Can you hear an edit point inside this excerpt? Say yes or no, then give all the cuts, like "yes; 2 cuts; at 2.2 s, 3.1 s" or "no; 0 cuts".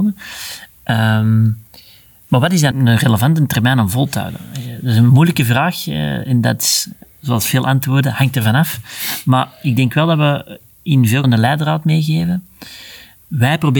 yes; 2 cuts; at 2.7 s, 11.2 s